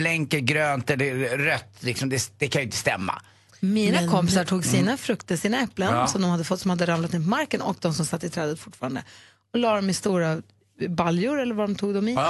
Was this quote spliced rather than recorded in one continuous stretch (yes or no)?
no